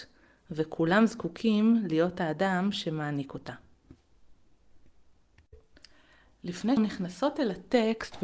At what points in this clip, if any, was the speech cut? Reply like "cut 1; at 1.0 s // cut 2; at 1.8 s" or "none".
cut 1; at 6.8 s